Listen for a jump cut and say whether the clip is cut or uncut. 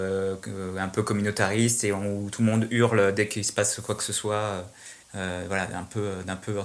cut